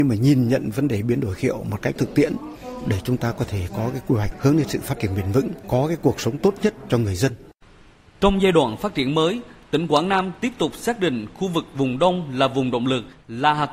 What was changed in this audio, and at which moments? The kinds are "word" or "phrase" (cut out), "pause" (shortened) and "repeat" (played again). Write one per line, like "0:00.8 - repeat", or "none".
none